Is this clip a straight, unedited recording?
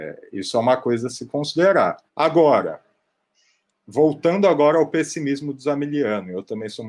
no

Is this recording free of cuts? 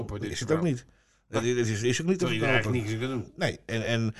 yes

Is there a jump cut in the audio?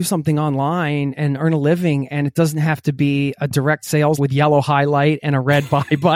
yes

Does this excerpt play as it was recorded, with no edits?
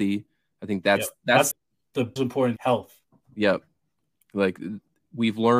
no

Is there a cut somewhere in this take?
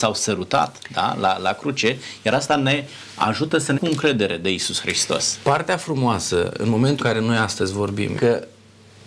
yes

